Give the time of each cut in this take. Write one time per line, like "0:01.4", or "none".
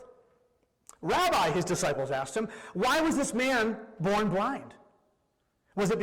none